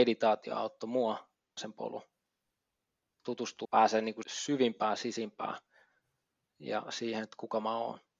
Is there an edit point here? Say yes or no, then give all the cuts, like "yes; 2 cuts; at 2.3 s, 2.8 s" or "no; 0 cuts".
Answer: yes; 3 cuts; at 1.6 s, 3.6 s, 4.2 s